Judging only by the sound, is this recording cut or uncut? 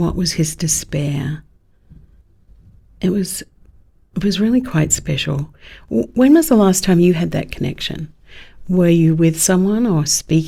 uncut